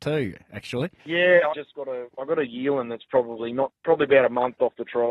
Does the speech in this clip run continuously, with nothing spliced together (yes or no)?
no